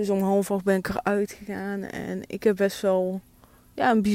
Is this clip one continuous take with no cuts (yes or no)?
yes